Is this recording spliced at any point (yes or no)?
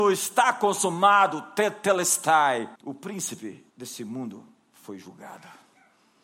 yes